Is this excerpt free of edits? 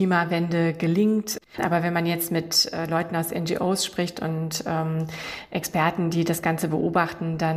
yes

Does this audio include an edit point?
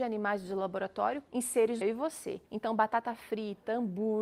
yes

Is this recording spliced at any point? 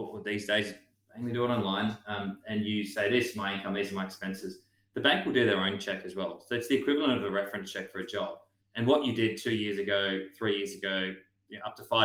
no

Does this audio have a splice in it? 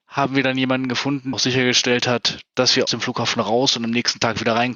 yes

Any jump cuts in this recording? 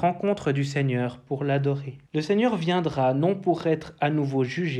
yes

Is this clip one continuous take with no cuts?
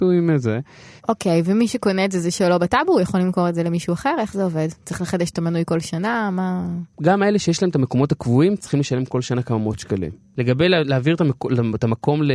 no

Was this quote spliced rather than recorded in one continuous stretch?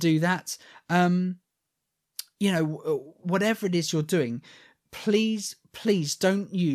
no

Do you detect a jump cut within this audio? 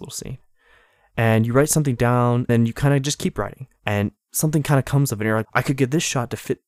yes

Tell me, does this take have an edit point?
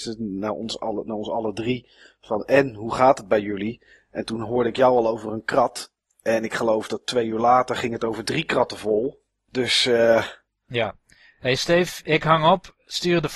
no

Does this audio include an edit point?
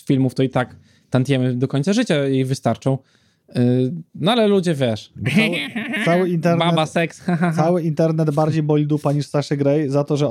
no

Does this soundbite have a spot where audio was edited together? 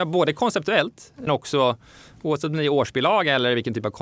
yes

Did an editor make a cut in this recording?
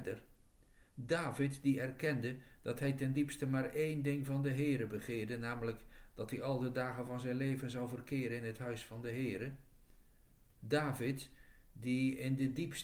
no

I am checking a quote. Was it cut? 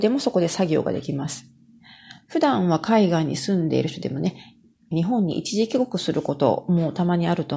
yes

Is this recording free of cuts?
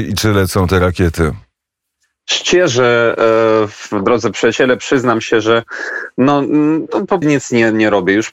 no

